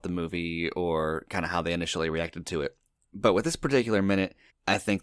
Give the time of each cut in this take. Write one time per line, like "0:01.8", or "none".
none